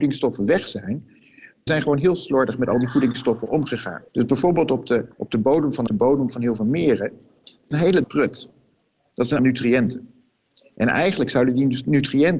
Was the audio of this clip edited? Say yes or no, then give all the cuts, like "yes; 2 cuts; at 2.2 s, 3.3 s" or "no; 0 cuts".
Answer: yes; 7 cuts; at 1.7 s, 4.1 s, 5.1 s, 5.9 s, 7.7 s, 8.0 s, 9.4 s